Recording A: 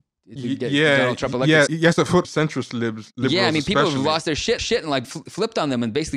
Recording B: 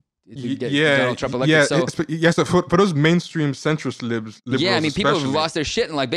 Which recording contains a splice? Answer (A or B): A